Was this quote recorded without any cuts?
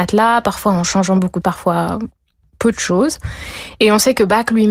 no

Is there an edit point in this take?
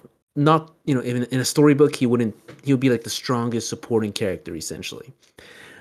no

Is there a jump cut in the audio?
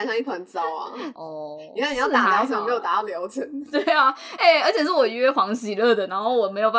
no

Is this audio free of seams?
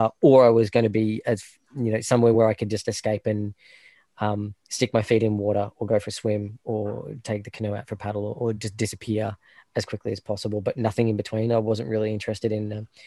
yes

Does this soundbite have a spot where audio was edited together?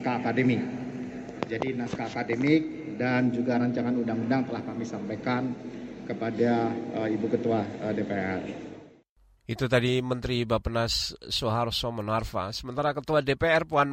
no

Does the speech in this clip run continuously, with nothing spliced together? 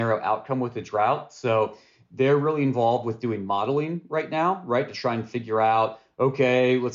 yes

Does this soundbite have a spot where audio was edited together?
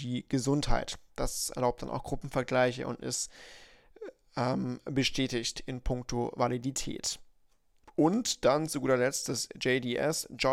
no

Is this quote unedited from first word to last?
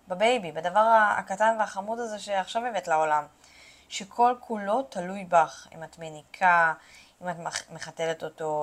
yes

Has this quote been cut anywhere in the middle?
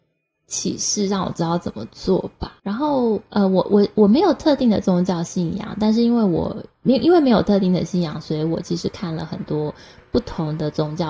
yes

